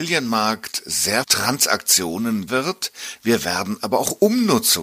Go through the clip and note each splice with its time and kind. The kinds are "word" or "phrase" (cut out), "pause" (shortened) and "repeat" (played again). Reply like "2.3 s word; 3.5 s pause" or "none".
1.2 s word; 2.5 s word